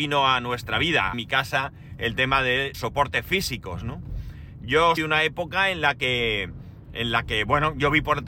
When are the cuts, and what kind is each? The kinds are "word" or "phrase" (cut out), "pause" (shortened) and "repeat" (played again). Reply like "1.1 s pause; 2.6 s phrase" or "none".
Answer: 1.1 s phrase; 2.7 s word; 5.0 s word